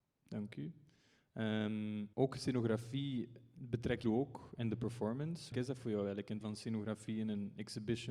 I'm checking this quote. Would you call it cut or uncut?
cut